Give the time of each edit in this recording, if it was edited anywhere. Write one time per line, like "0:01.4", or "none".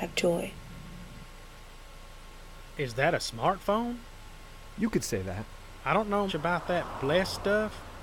0:06.3